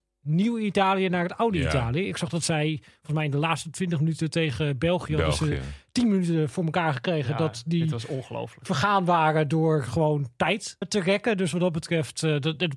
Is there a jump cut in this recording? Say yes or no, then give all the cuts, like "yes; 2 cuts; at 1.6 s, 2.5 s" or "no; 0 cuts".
yes; 1 cut; at 10.8 s